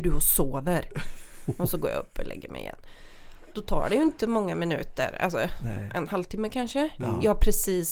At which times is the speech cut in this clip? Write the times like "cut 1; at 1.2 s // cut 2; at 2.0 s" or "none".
none